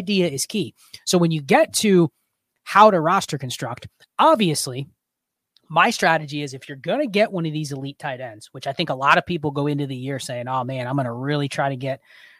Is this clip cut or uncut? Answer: uncut